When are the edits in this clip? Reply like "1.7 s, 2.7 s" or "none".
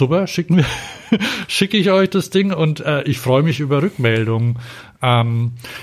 none